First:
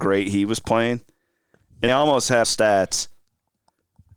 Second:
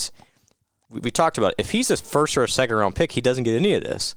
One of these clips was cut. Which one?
first; 2 cuts; at 1.9 s, 2.4 s

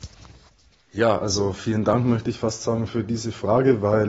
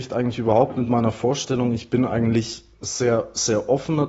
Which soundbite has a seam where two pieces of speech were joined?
second; 1 cut; at 2.7 s

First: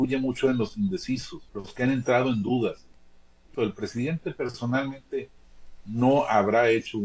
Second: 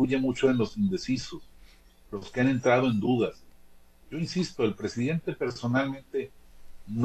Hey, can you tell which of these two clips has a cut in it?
first; 2 cuts; at 1.5 s, 3.5 s

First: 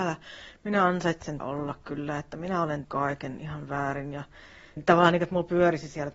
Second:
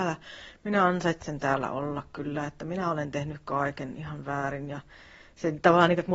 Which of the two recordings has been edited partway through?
first; 3 cuts; at 1.4 s, 2.8 s, 4.8 s

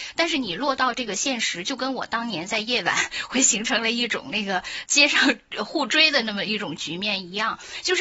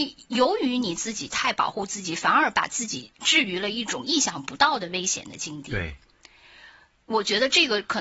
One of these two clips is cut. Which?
first; 1 cut; at 4.8 s

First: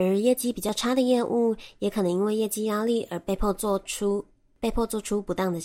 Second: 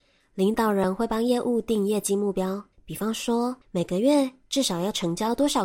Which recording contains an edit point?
second; 1 cut; at 2.7 s

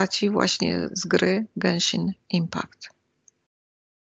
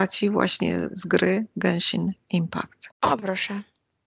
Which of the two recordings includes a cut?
second; 1 cut; at 2.9 s

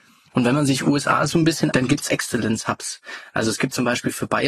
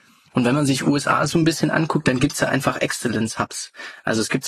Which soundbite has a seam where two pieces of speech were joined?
first; 2 cuts; at 1.7 s, 2.1 s

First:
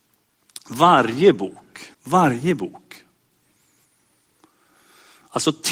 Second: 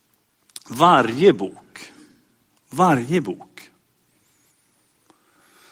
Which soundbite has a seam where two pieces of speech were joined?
first; 1 cut; at 1.9 s

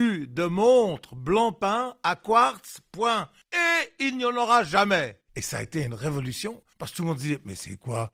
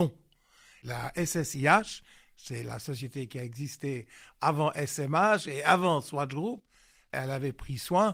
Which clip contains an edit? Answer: first; 3 cuts; at 3.4 s, 5.3 s, 6.7 s

